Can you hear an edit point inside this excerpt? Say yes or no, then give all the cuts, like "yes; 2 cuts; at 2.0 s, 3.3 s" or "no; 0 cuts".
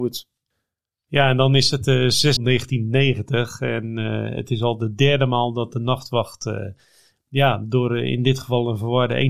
yes; 1 cut; at 2.4 s